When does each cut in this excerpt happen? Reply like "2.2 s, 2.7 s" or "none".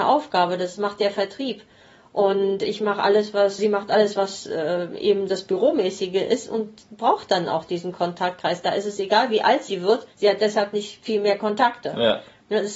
3.6 s, 10.1 s